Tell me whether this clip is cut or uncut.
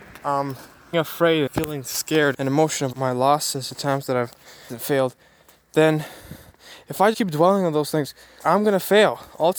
cut